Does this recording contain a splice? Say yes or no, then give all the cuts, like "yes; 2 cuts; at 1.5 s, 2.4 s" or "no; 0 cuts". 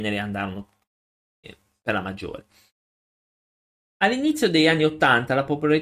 no; 0 cuts